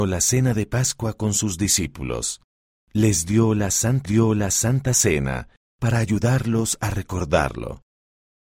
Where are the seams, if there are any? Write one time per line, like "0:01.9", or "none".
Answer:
0:04.1